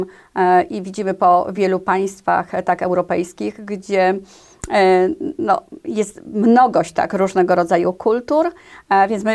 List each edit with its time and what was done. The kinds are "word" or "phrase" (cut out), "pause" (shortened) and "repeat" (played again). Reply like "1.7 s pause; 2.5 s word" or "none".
none